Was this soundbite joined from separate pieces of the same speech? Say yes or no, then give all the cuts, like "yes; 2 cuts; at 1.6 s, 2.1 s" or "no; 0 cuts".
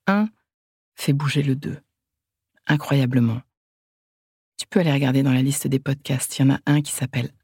no; 0 cuts